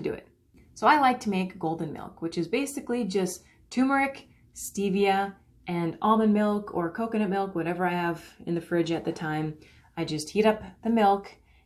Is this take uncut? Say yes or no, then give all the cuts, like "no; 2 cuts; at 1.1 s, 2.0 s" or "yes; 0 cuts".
yes; 0 cuts